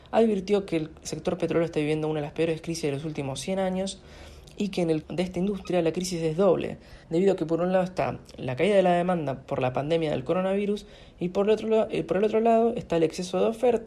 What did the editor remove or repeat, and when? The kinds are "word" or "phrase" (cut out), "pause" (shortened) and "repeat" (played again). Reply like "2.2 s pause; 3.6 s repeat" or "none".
5.0 s word; 7.0 s pause; 9.4 s word

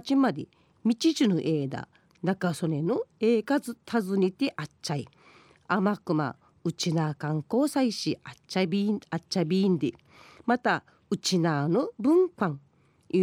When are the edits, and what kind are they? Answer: none

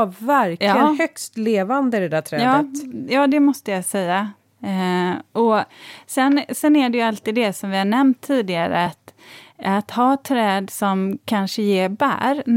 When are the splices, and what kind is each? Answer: none

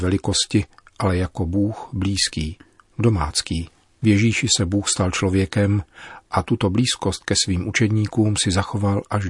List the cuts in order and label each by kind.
3.8 s pause

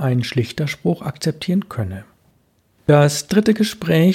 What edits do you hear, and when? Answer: none

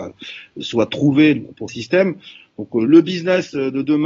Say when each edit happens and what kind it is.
1.7 s word; 2.9 s word

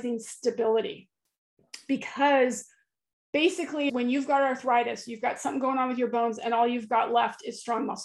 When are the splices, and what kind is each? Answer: 3.9 s word

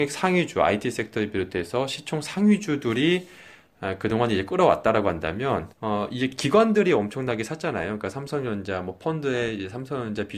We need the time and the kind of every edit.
5.7 s pause

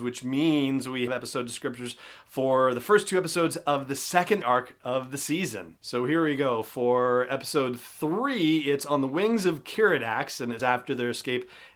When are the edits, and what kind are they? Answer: 1.1 s word; 4.4 s word; 10.6 s word

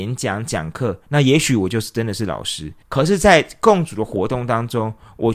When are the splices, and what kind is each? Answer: 2.8 s pause

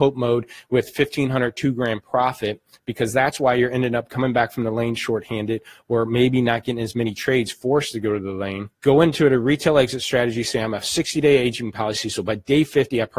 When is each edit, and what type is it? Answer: 8.7 s pause

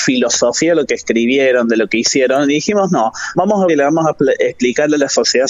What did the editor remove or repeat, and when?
3.7 s word

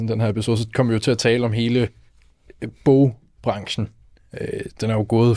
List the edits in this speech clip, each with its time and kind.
none

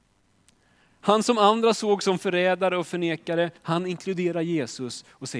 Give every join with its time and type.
3.6 s pause

